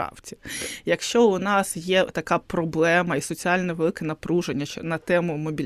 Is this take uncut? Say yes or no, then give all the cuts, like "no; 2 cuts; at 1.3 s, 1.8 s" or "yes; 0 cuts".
yes; 0 cuts